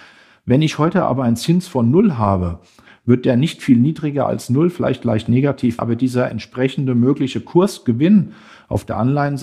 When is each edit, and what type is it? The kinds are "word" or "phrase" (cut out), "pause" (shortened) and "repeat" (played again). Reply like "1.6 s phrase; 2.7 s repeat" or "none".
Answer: 5.8 s word